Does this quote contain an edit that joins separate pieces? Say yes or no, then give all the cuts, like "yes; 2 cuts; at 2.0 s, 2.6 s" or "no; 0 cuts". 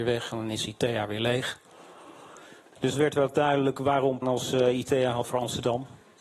yes; 3 cuts; at 2.9 s, 4.2 s, 5.2 s